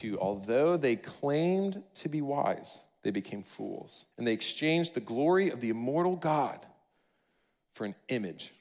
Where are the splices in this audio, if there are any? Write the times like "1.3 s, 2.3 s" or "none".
4.1 s